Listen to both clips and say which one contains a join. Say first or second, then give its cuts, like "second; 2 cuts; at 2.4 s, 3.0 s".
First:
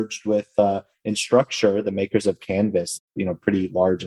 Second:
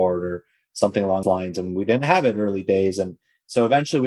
second; 1 cut; at 1.2 s